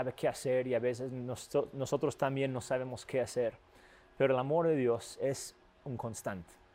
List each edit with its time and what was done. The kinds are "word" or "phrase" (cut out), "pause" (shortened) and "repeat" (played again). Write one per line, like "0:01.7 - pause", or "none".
none